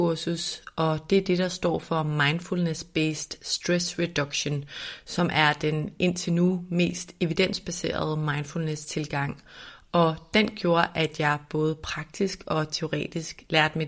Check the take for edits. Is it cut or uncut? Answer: uncut